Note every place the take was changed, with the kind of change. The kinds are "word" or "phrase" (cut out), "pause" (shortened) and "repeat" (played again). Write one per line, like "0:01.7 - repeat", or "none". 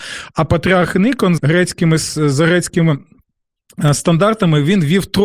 0:01.4 - word